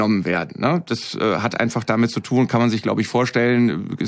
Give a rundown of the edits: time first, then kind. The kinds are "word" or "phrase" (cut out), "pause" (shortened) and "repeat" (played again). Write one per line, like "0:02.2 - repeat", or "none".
none

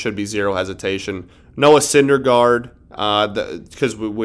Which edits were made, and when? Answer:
none

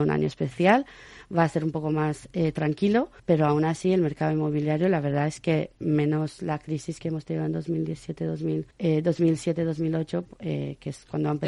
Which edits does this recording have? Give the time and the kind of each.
0:03.2 - pause
0:08.7 - pause

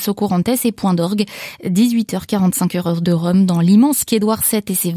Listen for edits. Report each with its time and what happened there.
0:04.1 - word

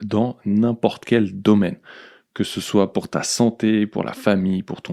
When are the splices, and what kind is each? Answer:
none

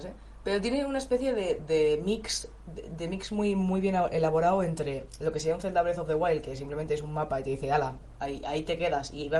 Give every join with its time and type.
none

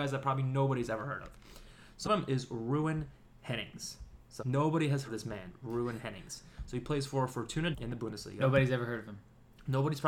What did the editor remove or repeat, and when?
0:02.0 - word
0:04.4 - word
0:05.1 - word
0:07.7 - word

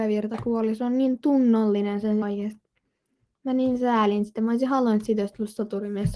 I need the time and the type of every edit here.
0:02.2 - word

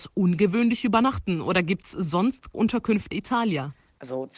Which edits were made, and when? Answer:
0:02.5 - word
0:03.1 - phrase

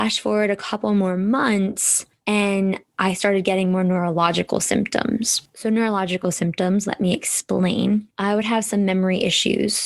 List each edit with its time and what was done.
none

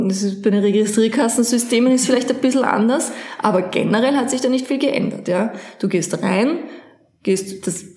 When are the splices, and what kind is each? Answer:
none

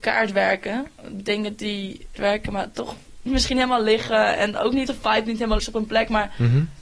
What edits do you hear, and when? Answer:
0:01.0 - pause
0:02.2 - phrase
0:03.3 - word
0:04.9 - word
0:05.6 - word

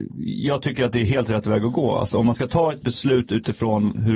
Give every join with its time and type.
none

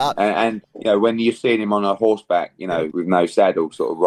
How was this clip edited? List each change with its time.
0:02.9 - word

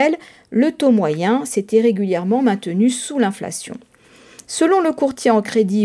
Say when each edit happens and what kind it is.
none

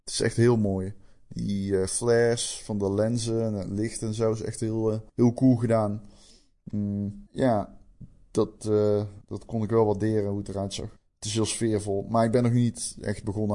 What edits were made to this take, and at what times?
0:05.1 - pause
0:07.3 - pause
0:09.2 - pause
0:11.0 - pause

